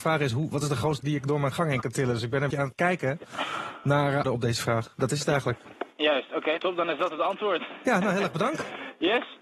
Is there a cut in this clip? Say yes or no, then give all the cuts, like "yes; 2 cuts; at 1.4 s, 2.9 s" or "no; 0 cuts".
yes; 4 cuts; at 1.0 s, 2.5 s, 4.2 s, 6.6 s